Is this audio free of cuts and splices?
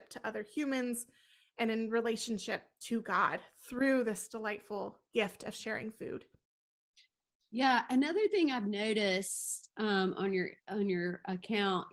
yes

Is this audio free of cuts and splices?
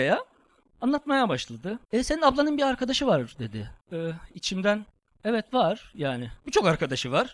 no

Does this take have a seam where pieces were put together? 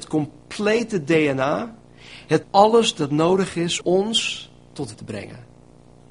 yes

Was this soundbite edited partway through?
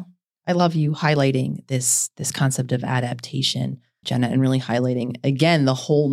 yes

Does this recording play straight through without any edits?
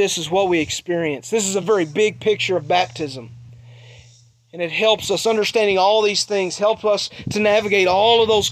yes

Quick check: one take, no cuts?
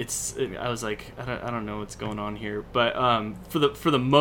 yes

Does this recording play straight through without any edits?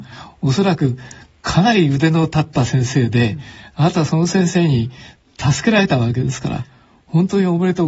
yes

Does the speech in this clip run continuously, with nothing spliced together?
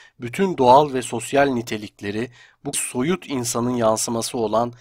no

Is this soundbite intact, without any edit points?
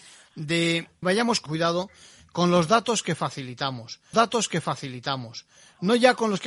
no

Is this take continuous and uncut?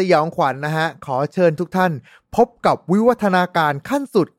yes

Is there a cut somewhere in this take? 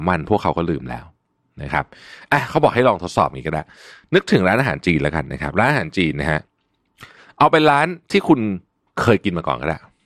no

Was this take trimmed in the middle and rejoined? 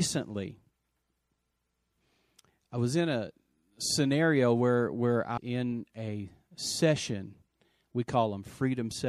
yes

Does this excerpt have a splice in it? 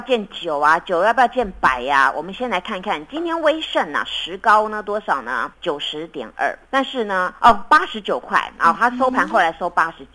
yes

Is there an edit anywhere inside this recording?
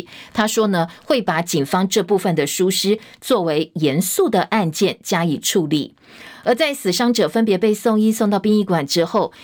no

